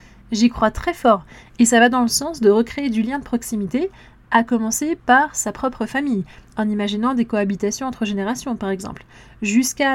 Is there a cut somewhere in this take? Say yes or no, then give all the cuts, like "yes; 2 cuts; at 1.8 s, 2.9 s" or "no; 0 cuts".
no; 0 cuts